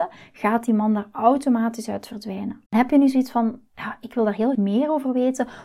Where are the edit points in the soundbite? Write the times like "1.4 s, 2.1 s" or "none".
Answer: 2.7 s, 3.7 s, 4.5 s